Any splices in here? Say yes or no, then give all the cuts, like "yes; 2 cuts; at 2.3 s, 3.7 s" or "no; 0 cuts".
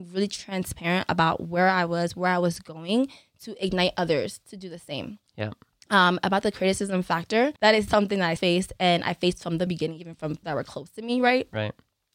yes; 5 cuts; at 7.6 s, 7.9 s, 8.4 s, 9.7 s, 10.4 s